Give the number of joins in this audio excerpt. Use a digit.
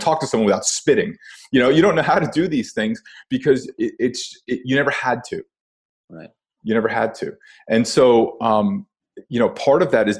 0